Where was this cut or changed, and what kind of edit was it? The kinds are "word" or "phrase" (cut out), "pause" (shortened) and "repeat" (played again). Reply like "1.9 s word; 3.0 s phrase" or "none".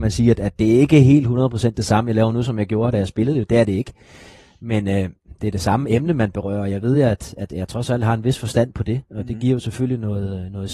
none